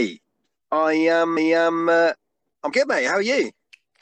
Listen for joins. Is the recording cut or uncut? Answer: cut